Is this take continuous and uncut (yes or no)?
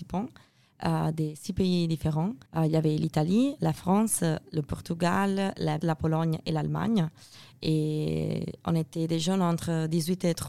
no